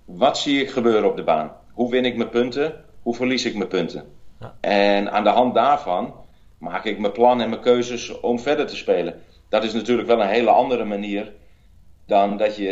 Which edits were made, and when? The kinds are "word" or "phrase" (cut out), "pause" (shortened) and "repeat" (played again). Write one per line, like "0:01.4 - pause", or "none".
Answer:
none